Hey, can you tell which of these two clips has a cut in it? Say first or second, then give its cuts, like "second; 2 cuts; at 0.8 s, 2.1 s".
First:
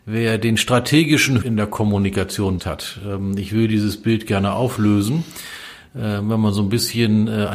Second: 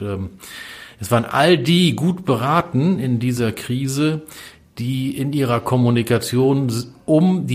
first; 2 cuts; at 1.4 s, 2.6 s